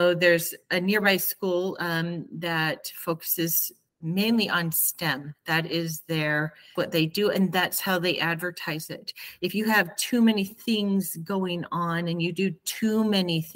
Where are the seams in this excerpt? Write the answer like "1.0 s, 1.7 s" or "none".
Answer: 3.9 s, 6.8 s